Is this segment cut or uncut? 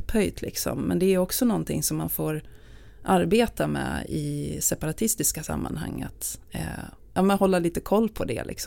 uncut